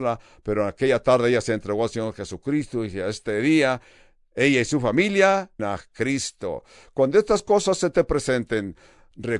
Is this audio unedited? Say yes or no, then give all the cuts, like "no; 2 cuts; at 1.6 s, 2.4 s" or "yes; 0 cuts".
no; 1 cut; at 5.6 s